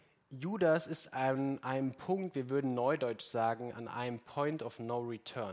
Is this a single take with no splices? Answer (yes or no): yes